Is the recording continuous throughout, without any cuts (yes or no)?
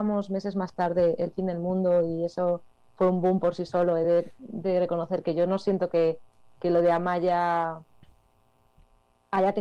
yes